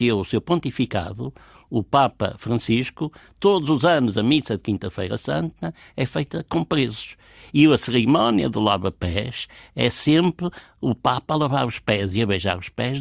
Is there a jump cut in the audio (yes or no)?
no